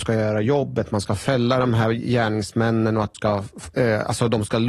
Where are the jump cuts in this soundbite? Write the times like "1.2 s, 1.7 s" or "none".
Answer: 3.1 s